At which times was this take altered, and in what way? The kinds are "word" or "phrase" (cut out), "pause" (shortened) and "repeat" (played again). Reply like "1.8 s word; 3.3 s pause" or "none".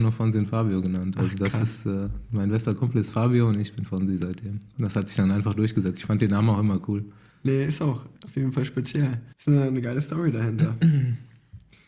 8.1 s pause; 9.3 s pause